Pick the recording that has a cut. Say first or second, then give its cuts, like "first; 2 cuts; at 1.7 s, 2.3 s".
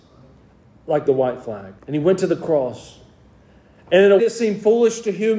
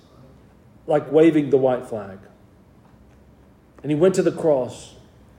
first; 3 cuts; at 1.1 s, 1.8 s, 4.2 s